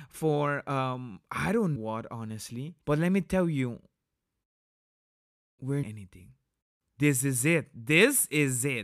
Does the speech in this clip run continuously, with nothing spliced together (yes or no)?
no